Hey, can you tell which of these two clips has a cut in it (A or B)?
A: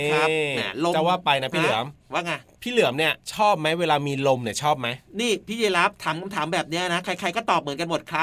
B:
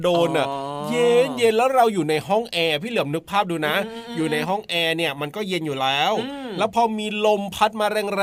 A